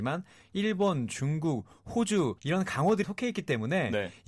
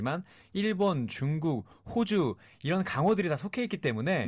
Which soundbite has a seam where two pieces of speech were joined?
first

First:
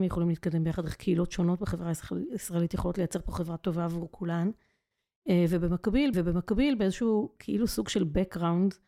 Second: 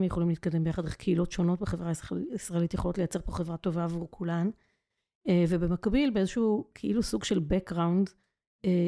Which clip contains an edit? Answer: first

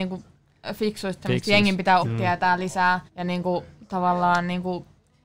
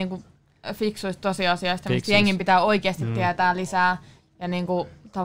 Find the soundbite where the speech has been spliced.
first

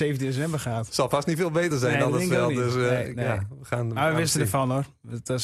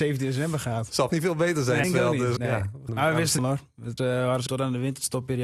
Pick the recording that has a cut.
second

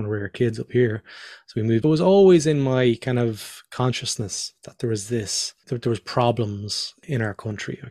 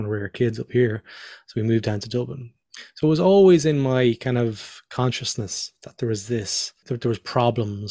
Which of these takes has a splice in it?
first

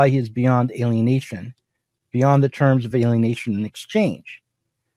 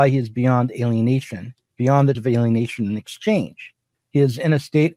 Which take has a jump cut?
second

